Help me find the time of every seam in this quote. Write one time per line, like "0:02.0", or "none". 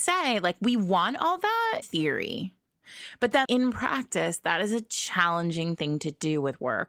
0:01.8
0:03.4